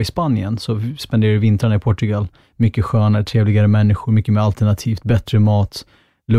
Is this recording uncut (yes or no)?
yes